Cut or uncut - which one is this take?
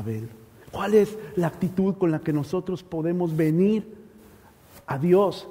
uncut